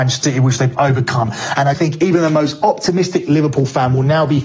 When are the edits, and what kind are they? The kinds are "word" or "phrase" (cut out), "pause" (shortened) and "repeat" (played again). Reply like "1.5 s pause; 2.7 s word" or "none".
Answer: 1.7 s word